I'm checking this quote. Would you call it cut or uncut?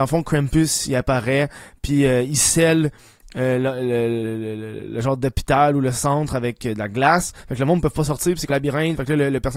cut